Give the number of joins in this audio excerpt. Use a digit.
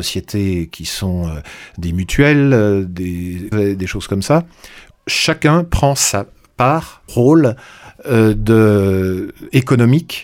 3